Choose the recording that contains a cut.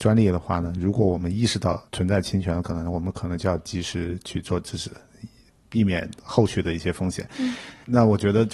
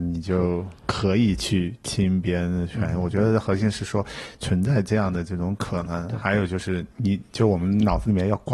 first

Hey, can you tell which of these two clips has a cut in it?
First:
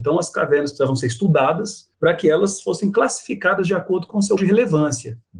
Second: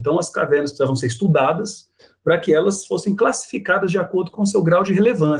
first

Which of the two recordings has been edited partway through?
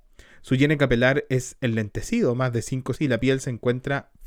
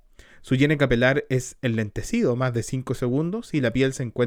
first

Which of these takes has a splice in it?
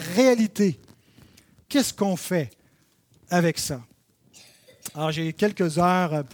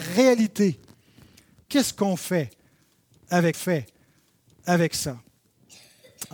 second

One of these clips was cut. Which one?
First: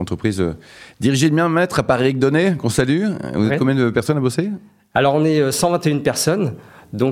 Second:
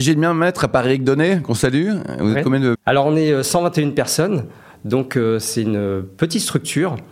second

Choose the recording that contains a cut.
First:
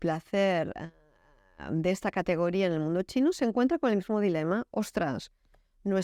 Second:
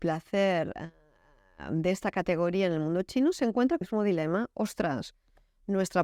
second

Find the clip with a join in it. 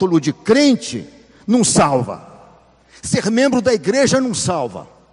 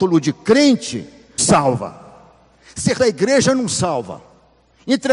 second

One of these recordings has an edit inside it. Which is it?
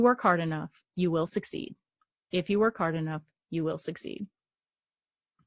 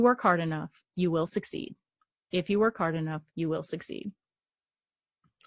second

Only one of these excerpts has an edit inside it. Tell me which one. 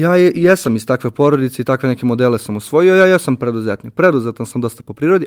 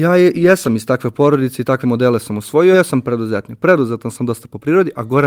second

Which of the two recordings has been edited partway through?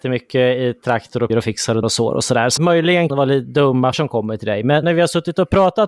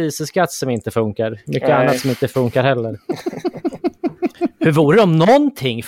first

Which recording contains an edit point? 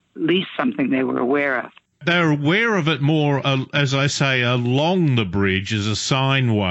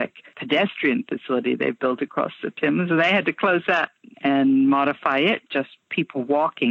second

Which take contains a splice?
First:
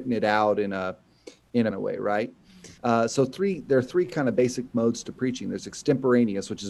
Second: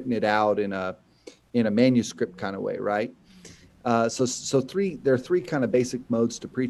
first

